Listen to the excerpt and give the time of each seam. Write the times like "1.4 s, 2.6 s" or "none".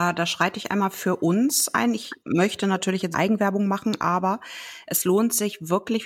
2.2 s, 3.1 s